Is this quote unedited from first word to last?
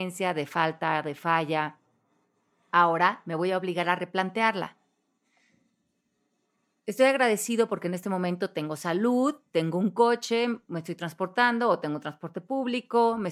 yes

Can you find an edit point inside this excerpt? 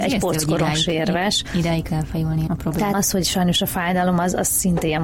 yes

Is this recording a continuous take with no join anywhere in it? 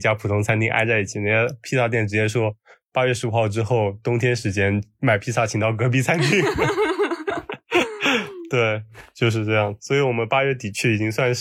yes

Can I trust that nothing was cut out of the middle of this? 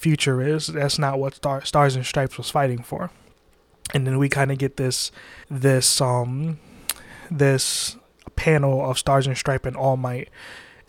no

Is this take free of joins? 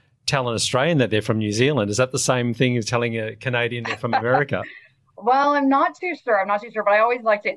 yes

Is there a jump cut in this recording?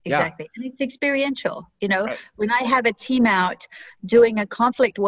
no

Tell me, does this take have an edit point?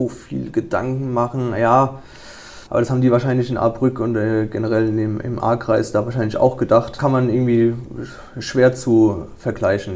yes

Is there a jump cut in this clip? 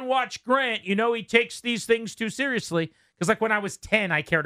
no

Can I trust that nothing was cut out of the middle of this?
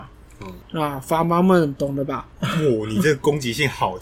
no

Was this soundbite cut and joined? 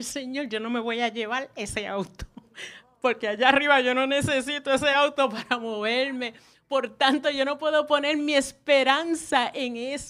no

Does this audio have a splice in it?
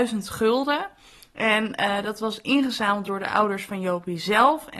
no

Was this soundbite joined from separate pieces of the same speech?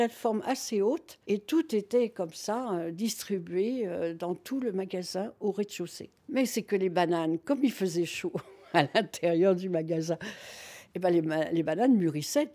yes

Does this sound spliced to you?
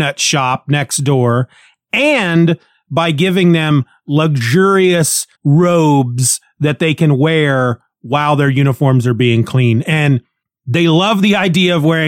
yes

